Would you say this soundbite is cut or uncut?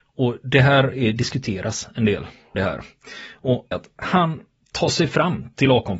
cut